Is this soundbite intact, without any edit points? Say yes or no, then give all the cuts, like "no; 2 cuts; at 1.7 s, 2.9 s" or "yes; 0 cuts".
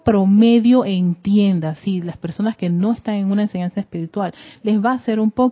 yes; 0 cuts